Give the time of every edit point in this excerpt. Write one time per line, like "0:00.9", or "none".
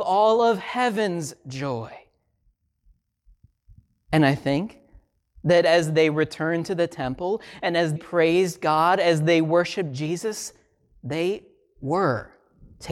0:08.0